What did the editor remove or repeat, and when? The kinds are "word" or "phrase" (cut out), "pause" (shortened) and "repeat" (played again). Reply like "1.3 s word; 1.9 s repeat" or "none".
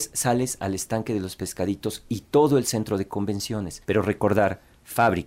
3.8 s pause